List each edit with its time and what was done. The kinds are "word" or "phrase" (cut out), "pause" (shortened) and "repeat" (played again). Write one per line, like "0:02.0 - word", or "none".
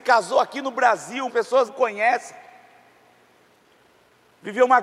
0:01.3 - word
0:01.7 - word